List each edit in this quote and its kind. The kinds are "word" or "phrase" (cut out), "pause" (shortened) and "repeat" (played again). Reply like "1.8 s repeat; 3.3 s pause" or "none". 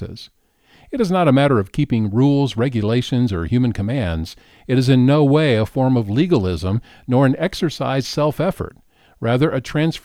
8.0 s word